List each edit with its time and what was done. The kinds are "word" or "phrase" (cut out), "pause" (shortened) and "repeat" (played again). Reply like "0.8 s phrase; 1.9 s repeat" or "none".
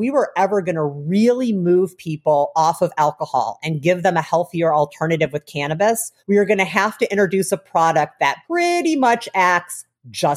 6.2 s pause; 8.4 s pause